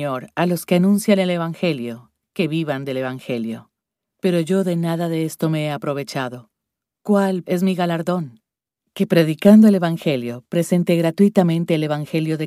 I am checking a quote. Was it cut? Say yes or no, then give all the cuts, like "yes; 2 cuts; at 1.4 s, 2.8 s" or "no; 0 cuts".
yes; 1 cut; at 7.4 s